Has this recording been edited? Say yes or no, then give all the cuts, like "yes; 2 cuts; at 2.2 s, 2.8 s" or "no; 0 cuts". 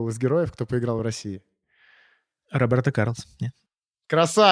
no; 0 cuts